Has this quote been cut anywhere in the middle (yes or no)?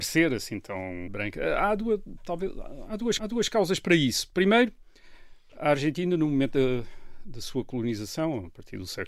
yes